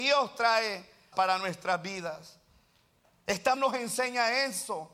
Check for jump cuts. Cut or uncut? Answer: cut